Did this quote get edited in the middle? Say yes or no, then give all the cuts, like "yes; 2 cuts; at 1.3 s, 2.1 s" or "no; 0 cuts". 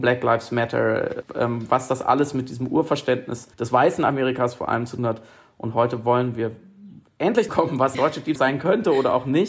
yes; 6 cuts; at 1.2 s, 3.5 s, 5.0 s, 7.5 s, 7.9 s, 8.4 s